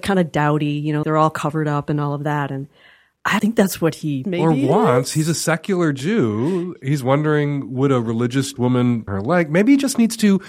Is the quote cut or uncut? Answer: cut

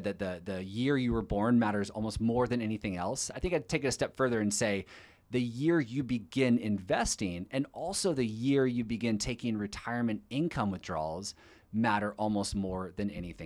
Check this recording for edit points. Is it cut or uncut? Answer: uncut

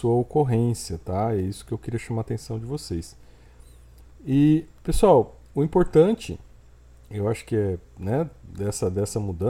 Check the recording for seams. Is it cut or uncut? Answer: uncut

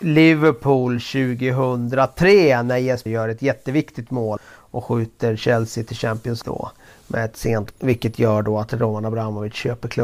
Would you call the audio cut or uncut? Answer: cut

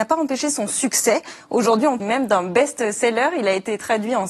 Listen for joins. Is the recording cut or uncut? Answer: cut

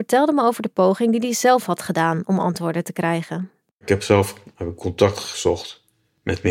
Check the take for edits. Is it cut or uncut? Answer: uncut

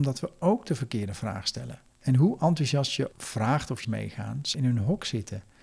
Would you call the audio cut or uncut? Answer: cut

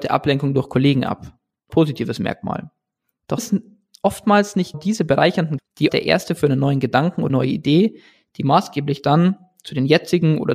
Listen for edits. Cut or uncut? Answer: cut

